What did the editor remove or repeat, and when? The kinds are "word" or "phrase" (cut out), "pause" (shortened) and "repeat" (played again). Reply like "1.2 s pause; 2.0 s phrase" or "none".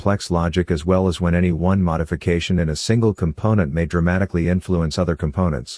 none